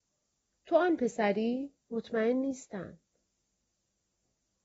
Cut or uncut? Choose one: cut